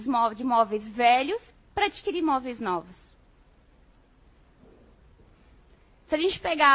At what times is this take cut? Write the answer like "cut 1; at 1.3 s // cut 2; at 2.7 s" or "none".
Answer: cut 1; at 1.5 s